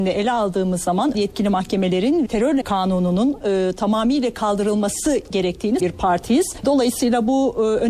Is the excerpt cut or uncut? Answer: cut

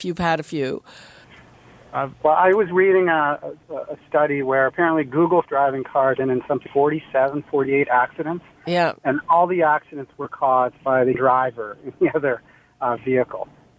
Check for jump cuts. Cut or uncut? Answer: cut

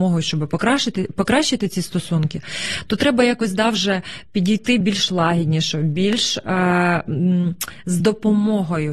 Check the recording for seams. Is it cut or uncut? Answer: uncut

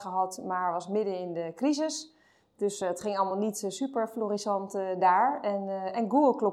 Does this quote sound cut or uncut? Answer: uncut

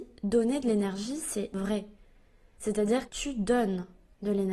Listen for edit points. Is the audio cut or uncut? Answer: cut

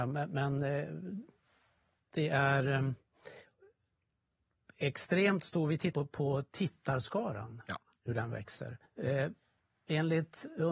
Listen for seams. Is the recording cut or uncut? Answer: cut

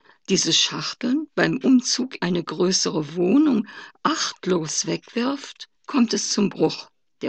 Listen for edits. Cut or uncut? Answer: cut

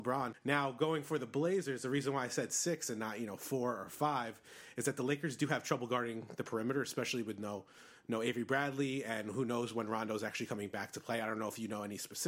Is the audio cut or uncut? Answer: uncut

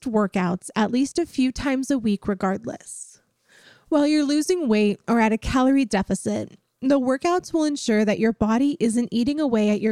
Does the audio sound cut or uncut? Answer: uncut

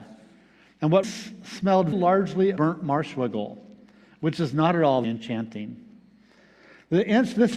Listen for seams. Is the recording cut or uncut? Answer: cut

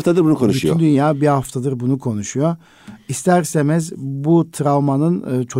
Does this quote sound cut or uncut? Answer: uncut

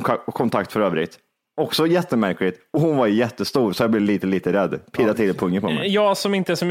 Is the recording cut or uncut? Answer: uncut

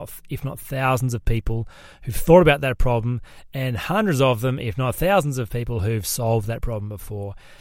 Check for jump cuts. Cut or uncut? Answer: uncut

